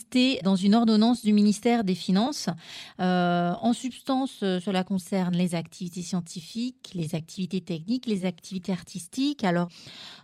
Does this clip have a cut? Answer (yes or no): no